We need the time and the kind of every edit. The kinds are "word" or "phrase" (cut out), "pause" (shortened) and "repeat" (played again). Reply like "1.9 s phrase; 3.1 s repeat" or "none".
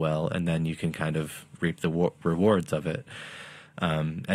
none